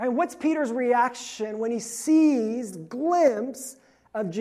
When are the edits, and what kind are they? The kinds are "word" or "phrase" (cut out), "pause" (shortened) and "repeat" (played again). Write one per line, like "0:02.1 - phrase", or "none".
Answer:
0:02.7 - word